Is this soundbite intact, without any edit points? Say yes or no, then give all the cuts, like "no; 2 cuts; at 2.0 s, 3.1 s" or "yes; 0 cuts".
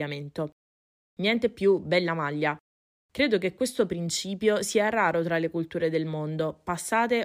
yes; 0 cuts